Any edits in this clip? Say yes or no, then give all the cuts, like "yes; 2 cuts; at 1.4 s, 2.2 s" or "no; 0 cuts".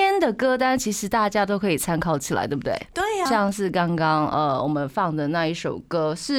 yes; 1 cut; at 3.3 s